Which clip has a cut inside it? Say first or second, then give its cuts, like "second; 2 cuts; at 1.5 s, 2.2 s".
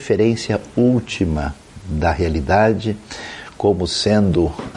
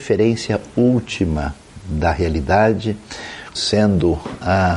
second; 1 cut; at 3.5 s